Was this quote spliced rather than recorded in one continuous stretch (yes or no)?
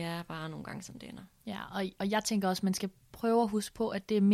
no